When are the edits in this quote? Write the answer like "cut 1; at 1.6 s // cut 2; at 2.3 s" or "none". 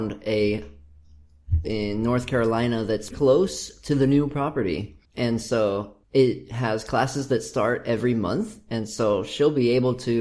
cut 1; at 1.6 s // cut 2; at 3.1 s // cut 3; at 5.0 s // cut 4; at 6.0 s

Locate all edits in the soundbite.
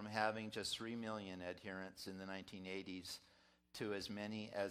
none

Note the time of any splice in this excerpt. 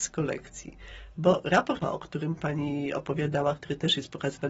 cut 1; at 1.8 s

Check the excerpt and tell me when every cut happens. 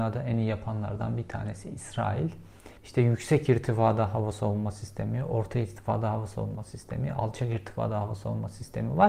cut 1; at 2.8 s

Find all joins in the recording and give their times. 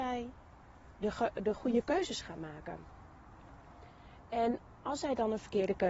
none

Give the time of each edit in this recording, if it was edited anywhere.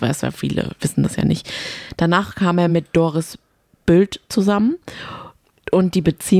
none

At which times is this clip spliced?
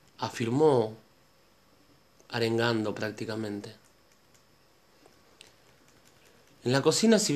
none

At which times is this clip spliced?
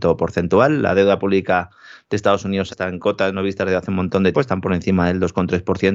cut 1; at 2.7 s // cut 2; at 4.3 s

